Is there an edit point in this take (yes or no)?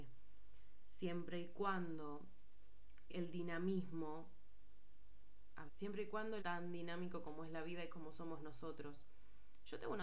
yes